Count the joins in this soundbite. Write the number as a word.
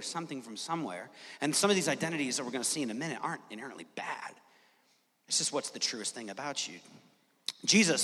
zero